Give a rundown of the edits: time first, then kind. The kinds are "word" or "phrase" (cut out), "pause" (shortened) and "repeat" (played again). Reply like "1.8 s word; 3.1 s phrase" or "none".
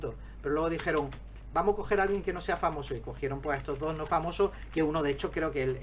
none